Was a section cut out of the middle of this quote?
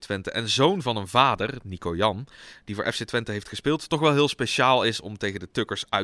no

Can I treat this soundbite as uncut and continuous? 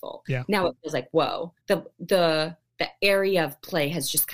no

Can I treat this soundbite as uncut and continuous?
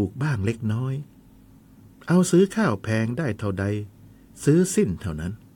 yes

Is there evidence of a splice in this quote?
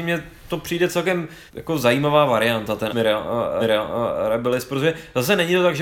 yes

